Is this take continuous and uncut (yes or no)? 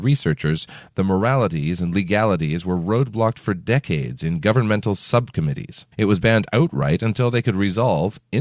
no